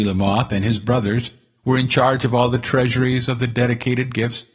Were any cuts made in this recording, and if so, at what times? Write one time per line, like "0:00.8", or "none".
none